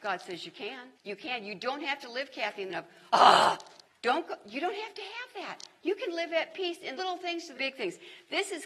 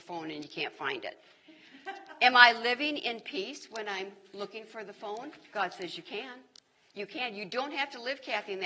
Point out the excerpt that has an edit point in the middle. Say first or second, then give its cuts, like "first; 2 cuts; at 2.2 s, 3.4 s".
first; 6 cuts; at 0.9 s, 2.7 s, 3.9 s, 5.8 s, 7.0 s, 7.5 s